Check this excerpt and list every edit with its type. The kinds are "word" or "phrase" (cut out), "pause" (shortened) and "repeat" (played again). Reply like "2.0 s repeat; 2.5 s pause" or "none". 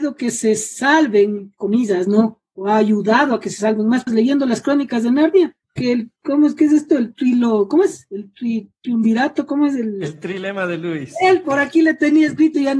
4.1 s word; 5.6 s pause; 6.2 s pause; 11.4 s word

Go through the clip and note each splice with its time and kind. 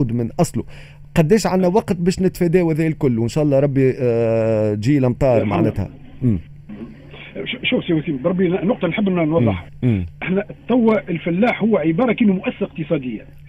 none

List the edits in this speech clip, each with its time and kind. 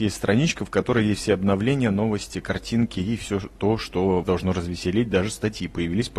4.2 s word

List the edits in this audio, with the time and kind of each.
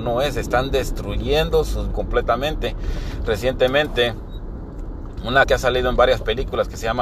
1.9 s word; 5.4 s word

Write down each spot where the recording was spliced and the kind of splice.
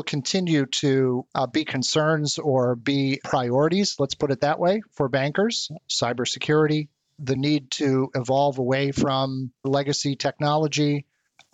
none

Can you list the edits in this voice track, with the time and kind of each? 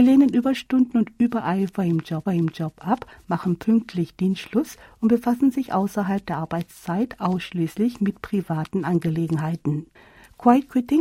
2.3 s repeat; 10.0 s pause

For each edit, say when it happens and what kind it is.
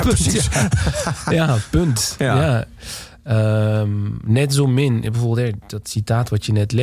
none

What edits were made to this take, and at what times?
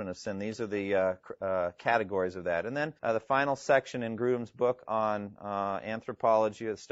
3.0 s pause

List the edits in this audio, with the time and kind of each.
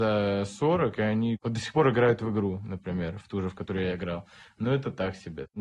none

